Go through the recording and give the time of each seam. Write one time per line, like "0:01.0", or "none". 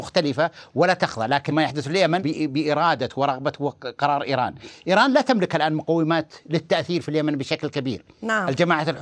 0:01.5
0:02.2